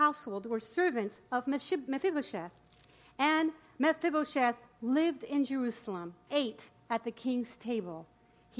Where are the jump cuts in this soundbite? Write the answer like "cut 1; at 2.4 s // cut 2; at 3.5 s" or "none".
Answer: cut 1; at 6.3 s